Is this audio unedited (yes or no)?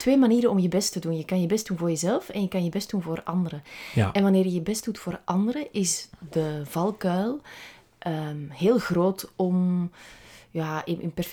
yes